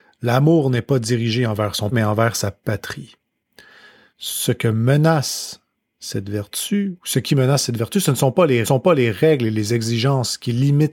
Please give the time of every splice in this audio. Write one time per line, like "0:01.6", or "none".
0:01.9
0:08.6